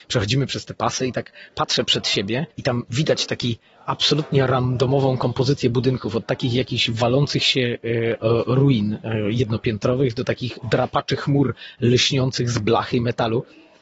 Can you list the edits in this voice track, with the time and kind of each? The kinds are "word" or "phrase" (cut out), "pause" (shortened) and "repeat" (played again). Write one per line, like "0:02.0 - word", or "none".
0:02.5 - pause